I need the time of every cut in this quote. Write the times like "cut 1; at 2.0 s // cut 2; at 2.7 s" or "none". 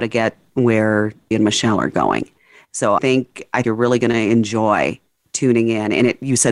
cut 1; at 1.3 s // cut 2; at 3.0 s // cut 3; at 3.6 s